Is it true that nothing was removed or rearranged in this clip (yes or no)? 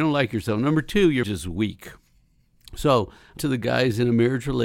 no